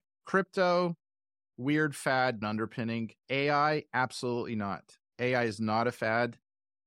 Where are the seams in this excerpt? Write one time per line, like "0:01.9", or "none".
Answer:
0:02.4
0:03.2
0:05.1